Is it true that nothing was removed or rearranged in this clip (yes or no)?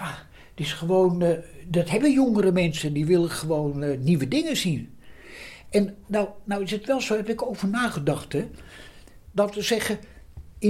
yes